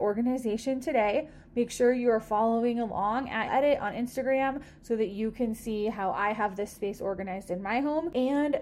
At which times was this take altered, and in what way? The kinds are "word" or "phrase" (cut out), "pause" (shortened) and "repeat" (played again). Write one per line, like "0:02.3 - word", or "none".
0:03.5 - word